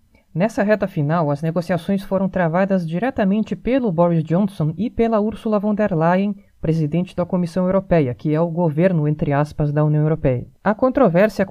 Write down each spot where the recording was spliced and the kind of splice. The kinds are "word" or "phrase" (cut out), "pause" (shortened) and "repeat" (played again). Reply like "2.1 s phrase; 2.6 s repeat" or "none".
10.6 s pause